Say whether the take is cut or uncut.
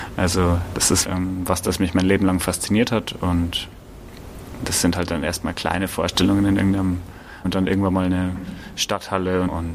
cut